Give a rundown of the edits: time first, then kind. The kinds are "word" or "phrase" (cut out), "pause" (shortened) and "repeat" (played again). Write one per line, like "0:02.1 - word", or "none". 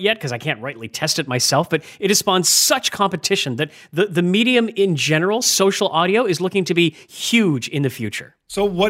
none

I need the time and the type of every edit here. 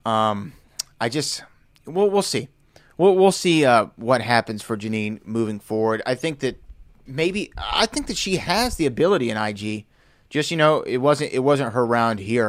none

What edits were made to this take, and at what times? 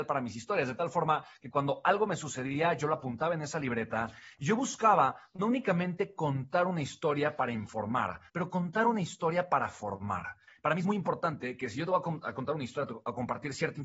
0:08.3 - pause

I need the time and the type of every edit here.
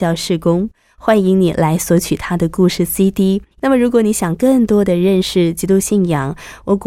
0:03.5 - pause

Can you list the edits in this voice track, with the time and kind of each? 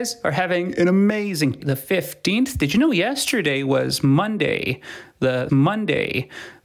0:01.6 - word
0:05.5 - repeat

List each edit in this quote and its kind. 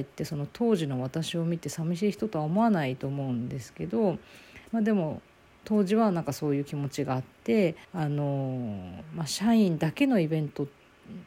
0:04.7 - pause
0:07.8 - pause

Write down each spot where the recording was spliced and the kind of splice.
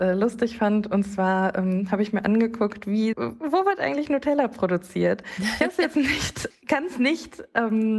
0:03.1 - word
0:06.5 - word

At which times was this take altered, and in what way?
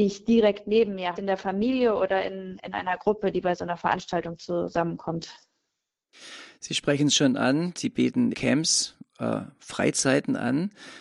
0:01.2 - phrase
0:08.3 - word

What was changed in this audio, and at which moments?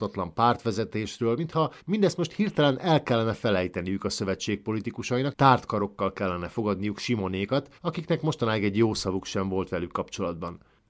0:01.8 - pause
0:05.3 - word
0:07.8 - pause

